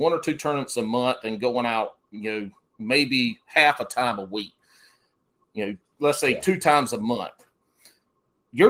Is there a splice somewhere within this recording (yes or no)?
no